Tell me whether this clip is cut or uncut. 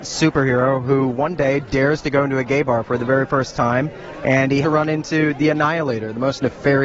cut